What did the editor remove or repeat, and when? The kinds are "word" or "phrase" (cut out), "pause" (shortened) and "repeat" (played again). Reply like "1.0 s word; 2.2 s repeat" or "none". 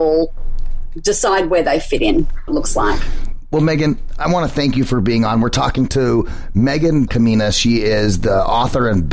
2.5 s phrase; 7.1 s word